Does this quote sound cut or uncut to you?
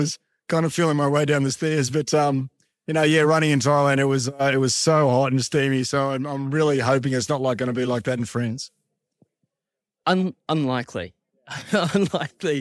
uncut